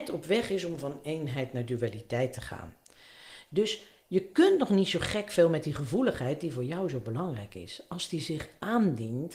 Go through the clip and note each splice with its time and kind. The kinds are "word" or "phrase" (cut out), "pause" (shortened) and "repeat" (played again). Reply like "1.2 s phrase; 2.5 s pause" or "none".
none